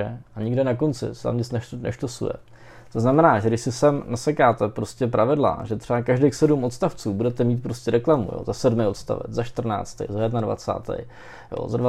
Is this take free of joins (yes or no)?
yes